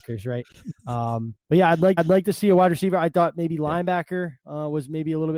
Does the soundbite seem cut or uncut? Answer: cut